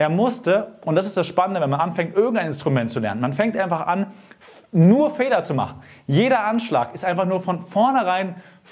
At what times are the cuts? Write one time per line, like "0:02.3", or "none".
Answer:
none

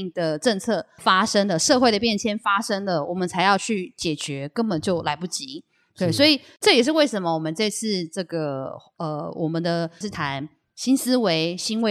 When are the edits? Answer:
0:01.0
0:10.0

